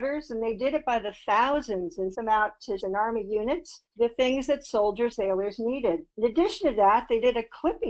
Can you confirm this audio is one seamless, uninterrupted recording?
no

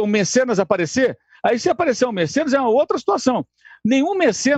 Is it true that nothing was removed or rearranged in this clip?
yes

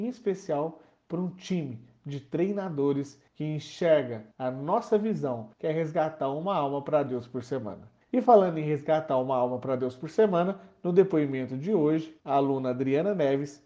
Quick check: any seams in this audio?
yes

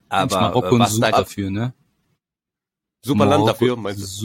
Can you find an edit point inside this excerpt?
yes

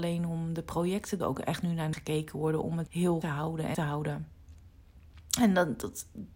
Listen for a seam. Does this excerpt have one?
yes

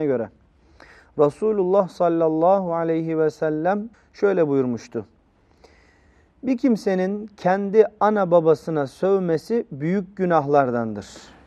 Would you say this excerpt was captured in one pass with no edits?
no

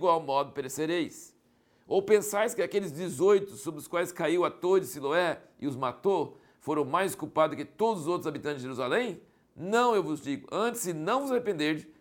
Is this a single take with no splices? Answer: yes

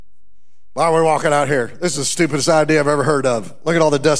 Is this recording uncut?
yes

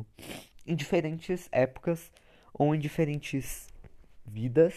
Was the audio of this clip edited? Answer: no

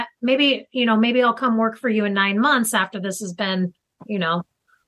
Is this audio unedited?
yes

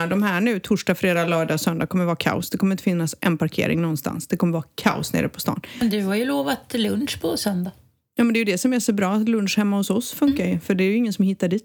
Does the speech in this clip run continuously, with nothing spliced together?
yes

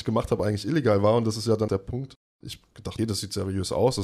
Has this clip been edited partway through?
yes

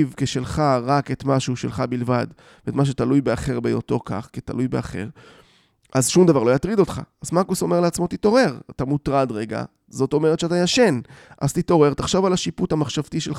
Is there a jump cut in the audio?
no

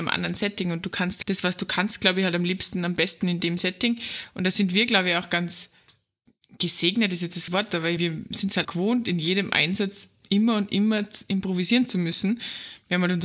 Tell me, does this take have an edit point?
yes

